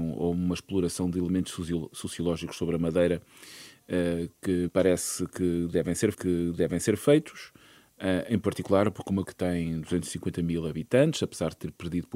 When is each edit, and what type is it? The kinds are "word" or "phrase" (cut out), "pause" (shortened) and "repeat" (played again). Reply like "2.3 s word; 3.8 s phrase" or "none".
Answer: 4.7 s word; 6.1 s repeat; 9.2 s word